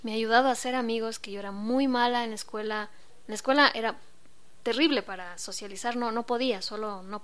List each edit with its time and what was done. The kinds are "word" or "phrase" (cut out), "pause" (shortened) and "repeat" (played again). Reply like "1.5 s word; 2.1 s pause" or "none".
none